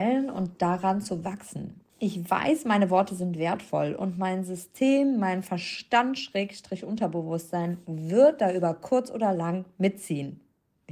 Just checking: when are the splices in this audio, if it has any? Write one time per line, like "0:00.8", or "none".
0:01.9